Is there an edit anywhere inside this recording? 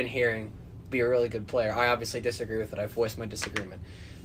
yes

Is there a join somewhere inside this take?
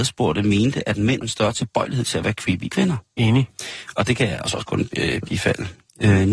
yes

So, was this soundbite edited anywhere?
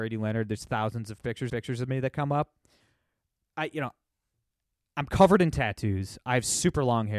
yes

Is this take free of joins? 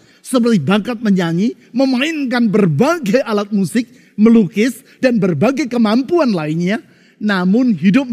yes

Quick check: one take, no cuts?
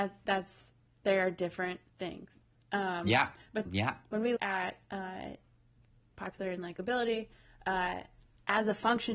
no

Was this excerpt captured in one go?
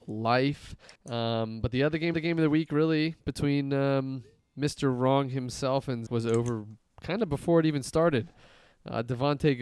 no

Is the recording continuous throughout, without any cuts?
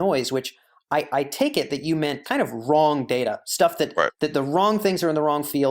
no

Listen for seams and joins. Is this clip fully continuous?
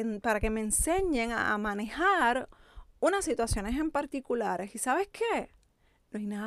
yes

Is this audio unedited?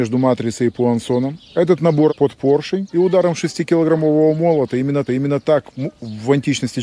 no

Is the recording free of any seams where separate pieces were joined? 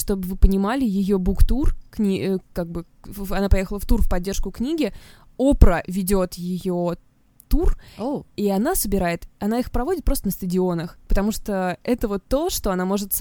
yes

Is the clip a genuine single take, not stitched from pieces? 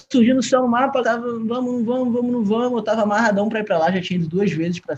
no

